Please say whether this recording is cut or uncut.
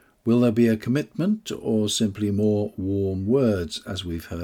uncut